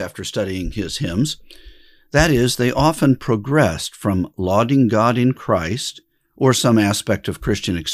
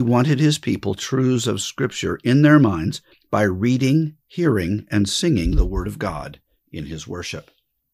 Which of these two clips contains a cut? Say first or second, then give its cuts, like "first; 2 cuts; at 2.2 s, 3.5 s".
second; 2 cuts; at 1.0 s, 3.1 s